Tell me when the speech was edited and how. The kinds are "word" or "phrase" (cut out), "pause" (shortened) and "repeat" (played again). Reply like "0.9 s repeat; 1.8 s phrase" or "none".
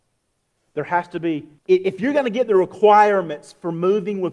1.6 s pause